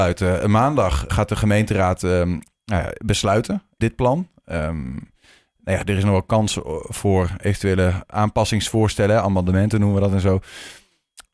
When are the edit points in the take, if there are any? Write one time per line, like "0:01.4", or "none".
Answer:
0:01.1
0:03.8